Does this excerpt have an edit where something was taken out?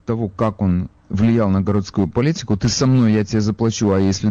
yes; 1 cut; at 1.0 s

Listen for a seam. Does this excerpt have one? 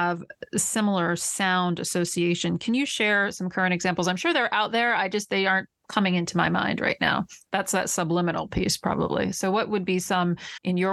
no; 0 cuts

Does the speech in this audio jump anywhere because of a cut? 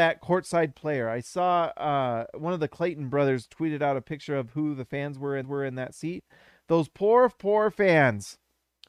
yes; 1 cut; at 5.4 s

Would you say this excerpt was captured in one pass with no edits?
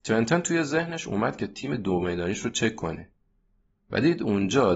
yes; 0 cuts

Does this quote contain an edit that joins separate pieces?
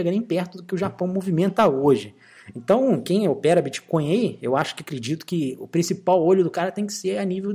no; 0 cuts

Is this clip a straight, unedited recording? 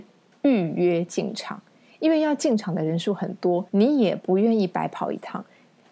no; 1 cut; at 3.7 s

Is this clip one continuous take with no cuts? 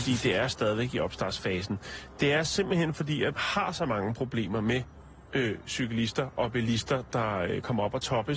no; 1 cut; at 3.3 s

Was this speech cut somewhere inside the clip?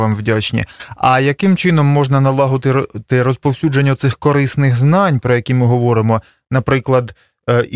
no; 0 cuts

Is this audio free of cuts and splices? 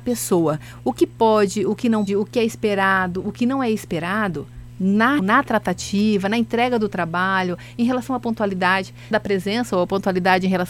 no; 3 cuts; at 2.1 s, 5.2 s, 9.1 s

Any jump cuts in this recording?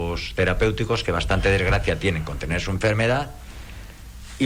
no; 0 cuts

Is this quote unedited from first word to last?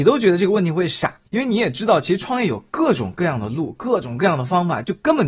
no; 1 cut; at 1.3 s

